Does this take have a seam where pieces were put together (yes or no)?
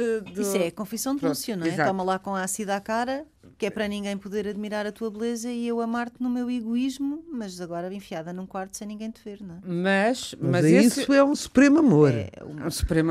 yes